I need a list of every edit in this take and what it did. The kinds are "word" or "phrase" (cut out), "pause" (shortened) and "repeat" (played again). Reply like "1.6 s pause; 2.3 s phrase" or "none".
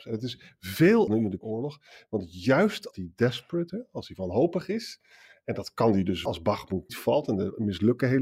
1.1 s word; 1.4 s word; 2.9 s word; 3.7 s word; 6.3 s word; 6.9 s word

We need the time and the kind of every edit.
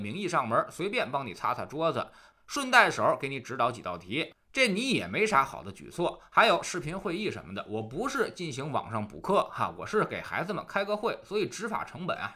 none

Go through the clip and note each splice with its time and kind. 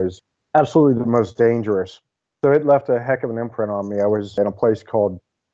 none

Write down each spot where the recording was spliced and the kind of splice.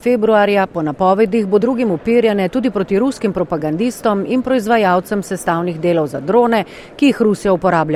1.6 s word

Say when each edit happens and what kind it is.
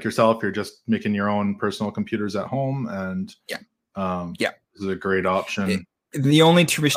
none

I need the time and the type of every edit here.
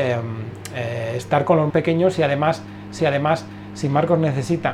1.7 s word; 3.0 s repeat

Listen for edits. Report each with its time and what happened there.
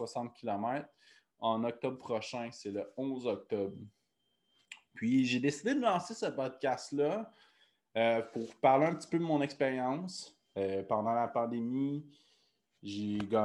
none

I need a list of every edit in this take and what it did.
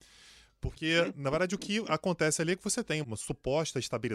3.0 s word

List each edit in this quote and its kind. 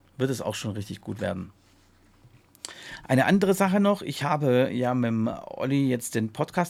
none

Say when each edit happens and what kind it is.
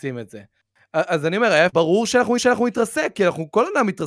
1.7 s word; 2.4 s repeat

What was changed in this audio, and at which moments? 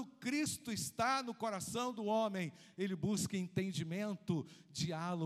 none

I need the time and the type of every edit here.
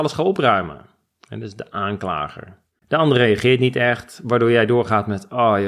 2.8 s pause

